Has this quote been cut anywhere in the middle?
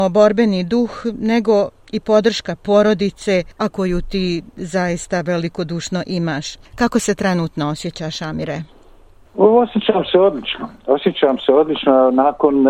no; 0 cuts

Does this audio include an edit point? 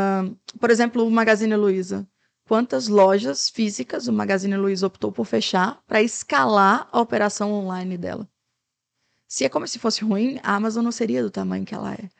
no; 0 cuts

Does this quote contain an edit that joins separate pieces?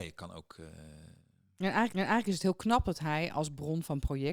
yes; 1 cut; at 1.9 s

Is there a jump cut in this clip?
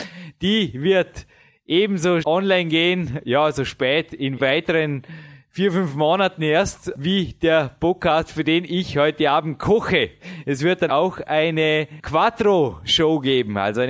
yes; 2 cuts; at 2.2 s, 10.9 s

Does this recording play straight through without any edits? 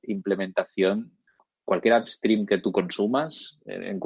yes; 0 cuts

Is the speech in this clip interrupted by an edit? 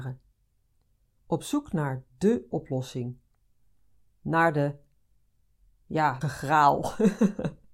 yes; 2 cuts; at 2.5 s, 6.2 s

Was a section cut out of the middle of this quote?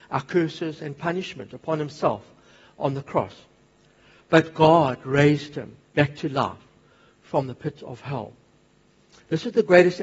no; 0 cuts

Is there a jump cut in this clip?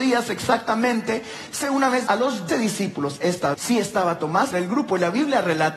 yes; 5 cuts; at 1.6 s, 2.1 s, 2.5 s, 3.5 s, 4.5 s

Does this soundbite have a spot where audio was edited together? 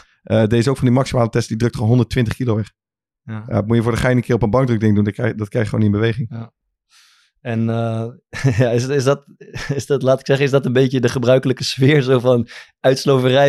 no; 0 cuts

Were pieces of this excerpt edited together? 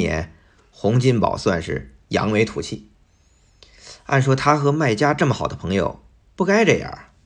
yes; 1 cut; at 6.2 s

